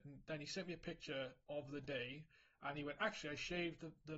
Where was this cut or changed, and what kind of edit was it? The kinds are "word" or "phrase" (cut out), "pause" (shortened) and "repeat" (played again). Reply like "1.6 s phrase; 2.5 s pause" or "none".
none